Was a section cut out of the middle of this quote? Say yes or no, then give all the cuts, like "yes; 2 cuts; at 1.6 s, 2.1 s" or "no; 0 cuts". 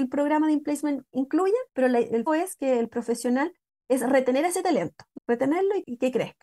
yes; 3 cuts; at 1.7 s, 2.3 s, 5.2 s